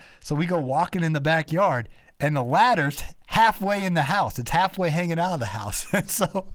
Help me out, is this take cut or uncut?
uncut